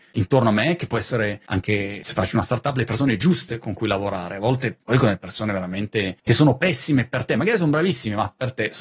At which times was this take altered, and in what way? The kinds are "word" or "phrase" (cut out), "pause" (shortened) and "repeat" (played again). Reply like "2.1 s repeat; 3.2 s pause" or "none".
none